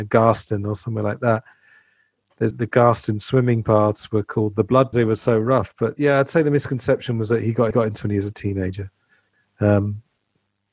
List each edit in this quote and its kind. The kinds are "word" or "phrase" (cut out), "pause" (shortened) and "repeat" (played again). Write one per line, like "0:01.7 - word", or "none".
0:02.5 - word
0:04.9 - phrase
0:07.7 - repeat
0:08.0 - phrase

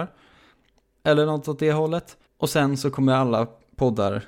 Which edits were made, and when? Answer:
0:02.3 - pause

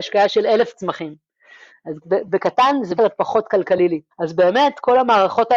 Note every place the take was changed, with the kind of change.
0:02.0 - phrase
0:03.0 - word
0:04.1 - pause

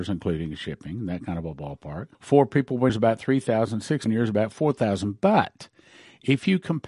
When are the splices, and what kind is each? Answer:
0:02.1 - pause
0:02.9 - word
0:04.1 - phrase

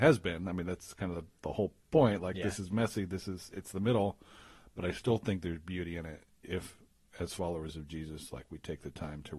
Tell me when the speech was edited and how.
none

